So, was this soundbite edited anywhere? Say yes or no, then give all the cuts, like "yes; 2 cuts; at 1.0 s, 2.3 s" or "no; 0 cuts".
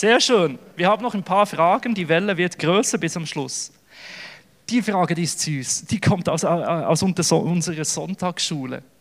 no; 0 cuts